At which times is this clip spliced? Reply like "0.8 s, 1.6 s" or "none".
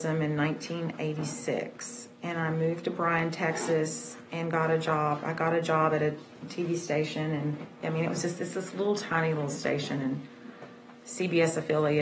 none